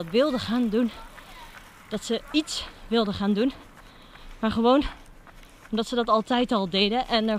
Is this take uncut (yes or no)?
yes